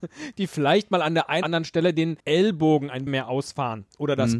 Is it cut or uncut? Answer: cut